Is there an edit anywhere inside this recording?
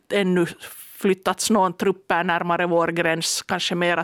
no; 0 cuts

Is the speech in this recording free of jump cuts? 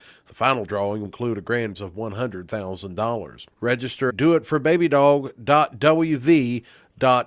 no; 3 cuts; at 1.1 s, 1.8 s, 4.1 s

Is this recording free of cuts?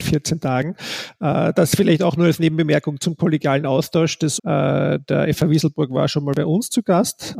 no; 1 cut; at 4.4 s

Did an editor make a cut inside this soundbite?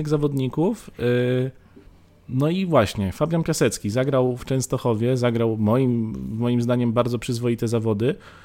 no; 0 cuts

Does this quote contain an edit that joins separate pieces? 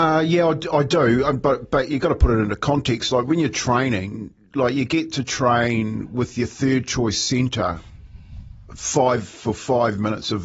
no; 0 cuts

